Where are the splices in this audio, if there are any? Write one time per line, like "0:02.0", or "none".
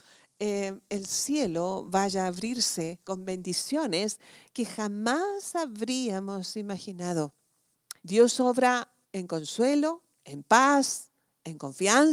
0:08.0
0:09.0
0:10.1